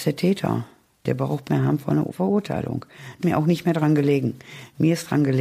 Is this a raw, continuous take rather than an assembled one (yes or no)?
no